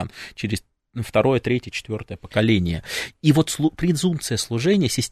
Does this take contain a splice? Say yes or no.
no